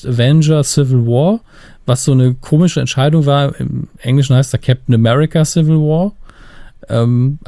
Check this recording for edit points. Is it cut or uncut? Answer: uncut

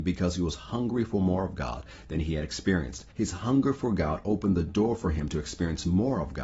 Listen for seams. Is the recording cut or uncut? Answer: cut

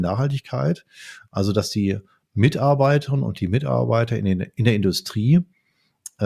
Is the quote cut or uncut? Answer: uncut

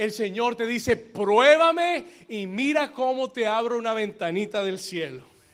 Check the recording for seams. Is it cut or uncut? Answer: uncut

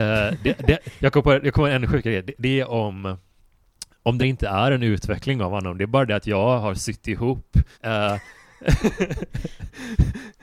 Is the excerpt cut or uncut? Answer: cut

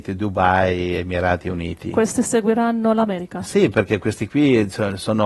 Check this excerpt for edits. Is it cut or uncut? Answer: uncut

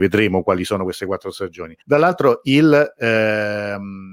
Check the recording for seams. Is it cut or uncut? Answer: cut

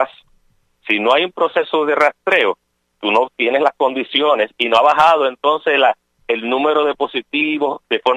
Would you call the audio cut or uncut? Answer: uncut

